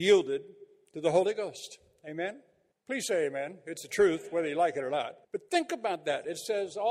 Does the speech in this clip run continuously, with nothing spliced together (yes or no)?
no